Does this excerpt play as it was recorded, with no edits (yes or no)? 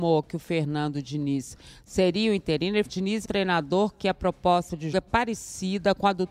no